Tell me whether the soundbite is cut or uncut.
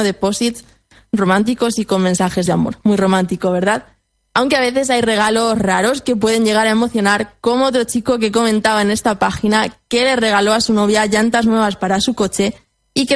uncut